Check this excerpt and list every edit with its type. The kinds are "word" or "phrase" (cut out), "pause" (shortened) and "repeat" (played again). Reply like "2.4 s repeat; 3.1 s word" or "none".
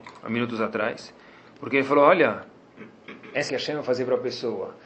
3.5 s word